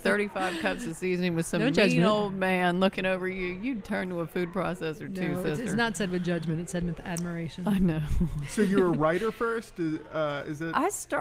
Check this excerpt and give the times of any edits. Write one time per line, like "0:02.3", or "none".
none